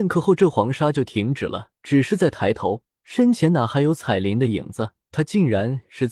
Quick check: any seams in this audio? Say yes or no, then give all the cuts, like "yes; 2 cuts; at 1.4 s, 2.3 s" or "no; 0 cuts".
yes; 3 cuts; at 1.8 s, 2.9 s, 5.0 s